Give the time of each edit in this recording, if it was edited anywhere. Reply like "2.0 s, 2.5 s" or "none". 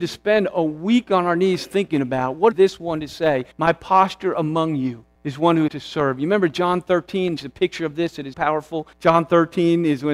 2.5 s, 3.5 s, 5.2 s, 5.7 s, 7.4 s, 8.3 s, 8.9 s